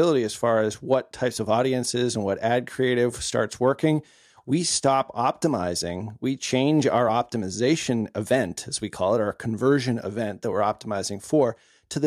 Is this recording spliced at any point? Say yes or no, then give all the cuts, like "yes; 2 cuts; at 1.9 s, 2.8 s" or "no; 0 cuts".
no; 0 cuts